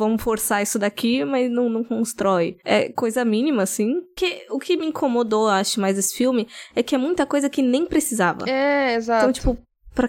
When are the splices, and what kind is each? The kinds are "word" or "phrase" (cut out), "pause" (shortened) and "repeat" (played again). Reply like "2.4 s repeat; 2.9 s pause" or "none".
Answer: none